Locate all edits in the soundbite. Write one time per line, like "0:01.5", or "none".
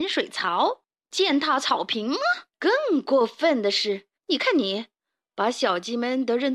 0:02.5
0:04.2